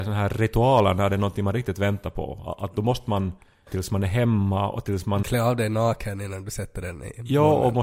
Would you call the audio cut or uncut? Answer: cut